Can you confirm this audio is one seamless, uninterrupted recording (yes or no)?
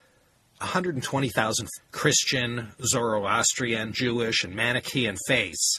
no